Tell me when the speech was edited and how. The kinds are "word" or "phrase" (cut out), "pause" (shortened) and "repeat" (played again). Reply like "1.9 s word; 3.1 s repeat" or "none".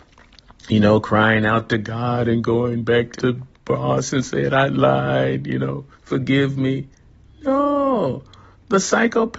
3.2 s word; 5.9 s pause